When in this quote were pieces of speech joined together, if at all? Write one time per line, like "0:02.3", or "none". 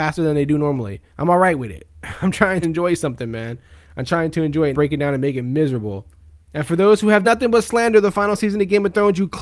0:01.1
0:02.6
0:04.7
0:06.2
0:07.2